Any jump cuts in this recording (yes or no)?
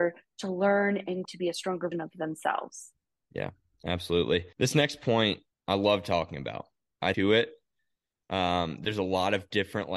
yes